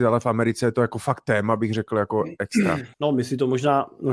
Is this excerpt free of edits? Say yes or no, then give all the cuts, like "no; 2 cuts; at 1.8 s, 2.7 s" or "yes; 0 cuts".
no; 1 cut; at 2.9 s